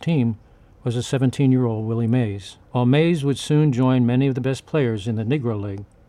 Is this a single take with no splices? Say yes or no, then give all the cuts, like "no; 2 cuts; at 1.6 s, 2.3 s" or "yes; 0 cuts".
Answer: no; 1 cut; at 2.6 s